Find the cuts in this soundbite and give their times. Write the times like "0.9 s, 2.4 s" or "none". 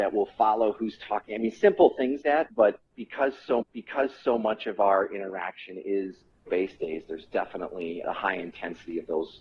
2.2 s, 3.6 s, 6.5 s, 6.8 s, 8.0 s